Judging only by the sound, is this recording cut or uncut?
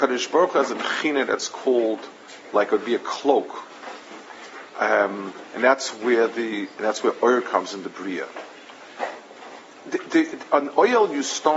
uncut